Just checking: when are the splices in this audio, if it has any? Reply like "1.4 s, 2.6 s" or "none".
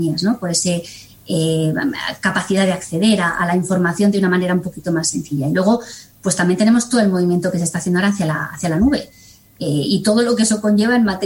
none